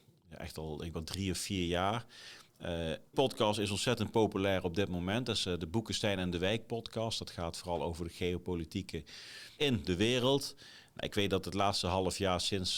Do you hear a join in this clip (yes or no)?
yes